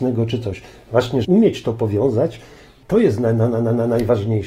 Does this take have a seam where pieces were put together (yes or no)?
yes